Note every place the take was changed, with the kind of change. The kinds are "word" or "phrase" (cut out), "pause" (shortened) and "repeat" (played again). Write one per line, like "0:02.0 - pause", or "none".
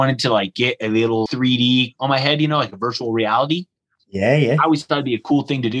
0:01.3 - word
0:02.0 - word